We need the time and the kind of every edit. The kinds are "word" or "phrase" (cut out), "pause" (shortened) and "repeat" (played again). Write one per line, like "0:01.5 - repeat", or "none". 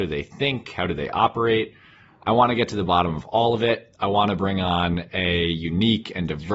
none